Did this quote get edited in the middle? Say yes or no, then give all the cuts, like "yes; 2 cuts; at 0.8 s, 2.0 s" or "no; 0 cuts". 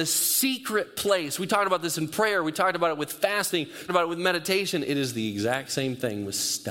yes; 1 cut; at 3.9 s